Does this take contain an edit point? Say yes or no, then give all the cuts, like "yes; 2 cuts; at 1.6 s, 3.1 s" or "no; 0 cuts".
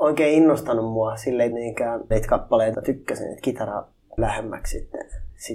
yes; 4 cuts; at 1.5 s, 2.1 s, 2.7 s, 4.2 s